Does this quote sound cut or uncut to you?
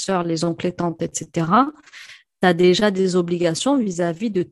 uncut